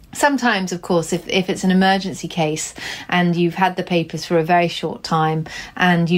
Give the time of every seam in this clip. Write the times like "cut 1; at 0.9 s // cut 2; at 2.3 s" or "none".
none